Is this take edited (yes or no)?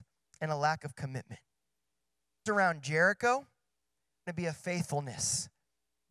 yes